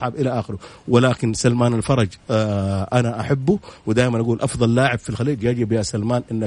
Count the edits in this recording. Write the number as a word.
zero